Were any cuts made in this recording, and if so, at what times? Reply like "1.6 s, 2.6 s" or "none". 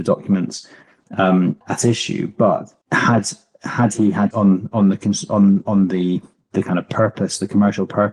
1.6 s, 2.8 s, 4.3 s